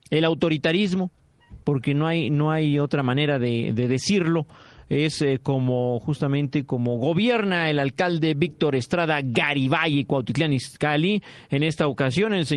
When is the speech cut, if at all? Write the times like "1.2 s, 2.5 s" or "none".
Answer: 1.6 s